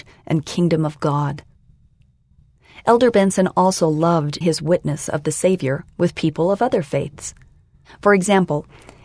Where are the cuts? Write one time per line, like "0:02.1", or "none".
0:04.4